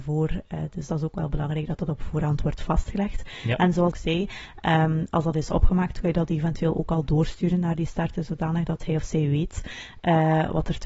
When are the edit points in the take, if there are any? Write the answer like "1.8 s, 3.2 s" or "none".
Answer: 3.9 s